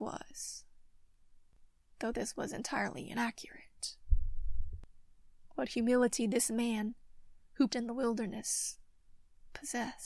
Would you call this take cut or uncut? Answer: cut